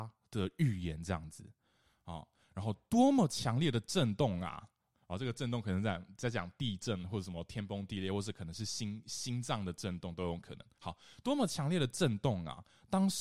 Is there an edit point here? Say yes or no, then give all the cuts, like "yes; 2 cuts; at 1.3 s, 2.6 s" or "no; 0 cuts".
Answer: no; 0 cuts